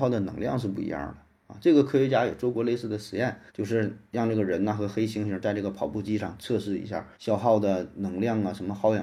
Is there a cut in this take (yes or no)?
yes